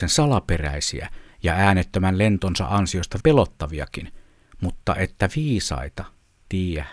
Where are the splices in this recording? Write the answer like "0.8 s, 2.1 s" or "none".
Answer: 3.2 s

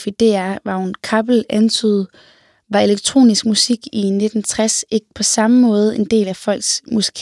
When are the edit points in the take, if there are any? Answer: none

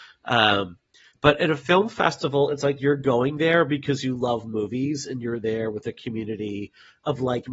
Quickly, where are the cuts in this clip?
none

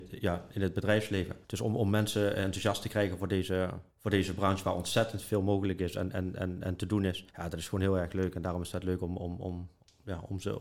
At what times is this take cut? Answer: 1.4 s, 3.9 s, 7.3 s

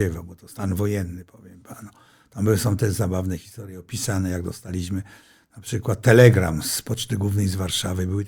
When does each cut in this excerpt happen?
none

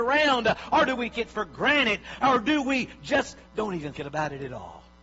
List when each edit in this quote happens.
1.1 s, 3.5 s, 3.9 s

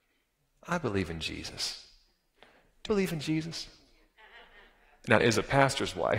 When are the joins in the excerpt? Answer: 2.9 s, 5.2 s

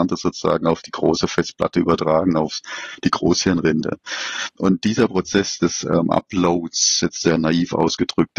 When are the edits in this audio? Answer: none

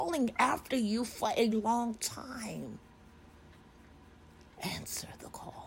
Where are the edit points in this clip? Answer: 1.5 s

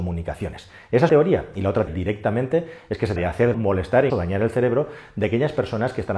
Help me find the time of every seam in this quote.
1.1 s, 1.9 s, 3.2 s, 3.5 s, 4.1 s

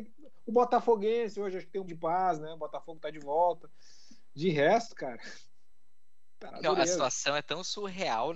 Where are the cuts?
1.9 s, 6.5 s

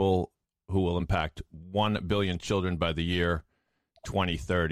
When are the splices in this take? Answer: none

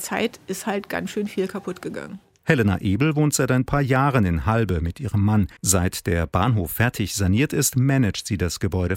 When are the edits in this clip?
5.6 s

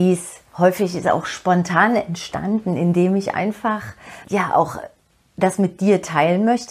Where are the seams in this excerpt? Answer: none

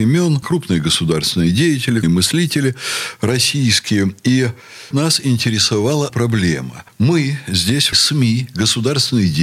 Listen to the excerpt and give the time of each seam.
2.0 s, 4.9 s, 6.1 s, 7.9 s

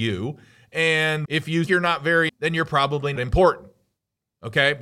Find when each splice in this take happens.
1.2 s, 1.7 s, 2.3 s, 3.2 s

